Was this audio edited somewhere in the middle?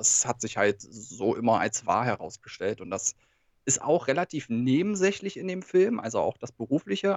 no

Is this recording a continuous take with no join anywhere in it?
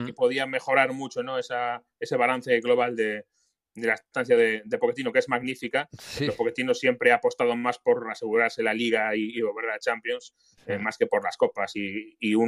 yes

